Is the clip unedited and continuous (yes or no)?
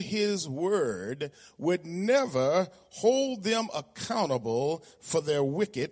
yes